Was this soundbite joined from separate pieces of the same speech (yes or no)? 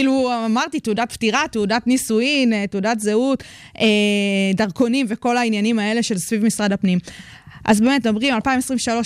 no